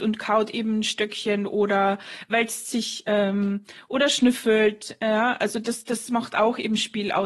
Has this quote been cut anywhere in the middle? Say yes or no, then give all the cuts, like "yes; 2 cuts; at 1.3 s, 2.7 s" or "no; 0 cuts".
no; 0 cuts